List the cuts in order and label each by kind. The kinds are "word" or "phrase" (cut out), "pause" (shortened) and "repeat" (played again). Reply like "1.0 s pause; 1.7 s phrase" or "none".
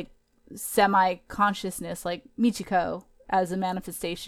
none